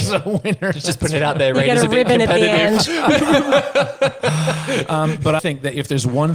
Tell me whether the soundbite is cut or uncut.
cut